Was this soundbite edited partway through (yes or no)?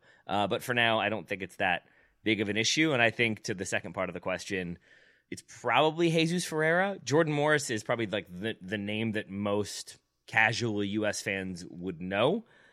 no